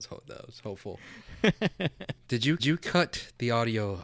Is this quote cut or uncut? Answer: cut